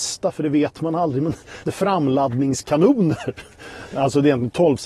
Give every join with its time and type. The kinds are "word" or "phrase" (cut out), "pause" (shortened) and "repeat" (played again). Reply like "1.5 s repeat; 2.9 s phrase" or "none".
1.6 s word